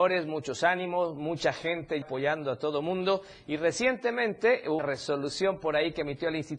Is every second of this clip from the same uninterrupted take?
no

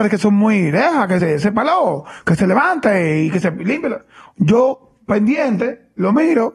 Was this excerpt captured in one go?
yes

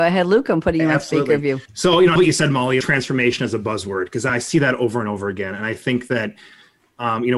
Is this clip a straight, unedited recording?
no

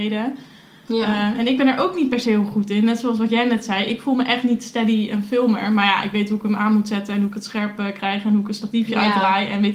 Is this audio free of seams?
yes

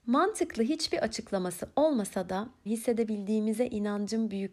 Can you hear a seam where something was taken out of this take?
yes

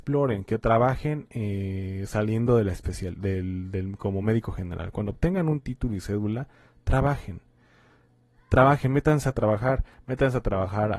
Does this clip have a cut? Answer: no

